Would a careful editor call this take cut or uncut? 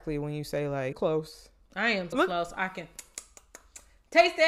cut